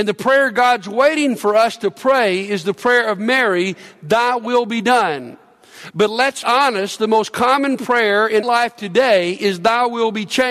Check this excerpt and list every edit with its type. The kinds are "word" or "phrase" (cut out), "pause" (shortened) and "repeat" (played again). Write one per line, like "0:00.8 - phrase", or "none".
0:06.4 - word
0:08.4 - word